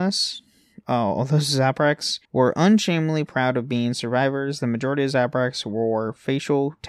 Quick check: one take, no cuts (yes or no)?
no